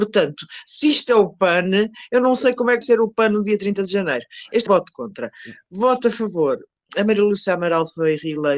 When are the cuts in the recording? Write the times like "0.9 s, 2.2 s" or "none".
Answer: 2.8 s, 4.7 s, 6.9 s